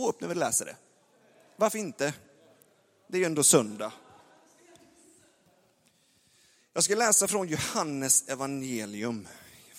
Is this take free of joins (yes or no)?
yes